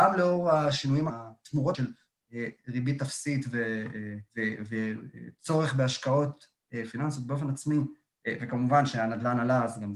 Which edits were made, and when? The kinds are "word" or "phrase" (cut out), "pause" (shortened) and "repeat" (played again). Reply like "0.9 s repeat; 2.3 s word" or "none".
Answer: 1.1 s word; 1.7 s word; 4.3 s pause